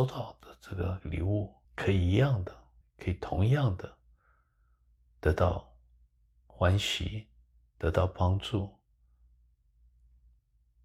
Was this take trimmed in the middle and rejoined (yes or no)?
yes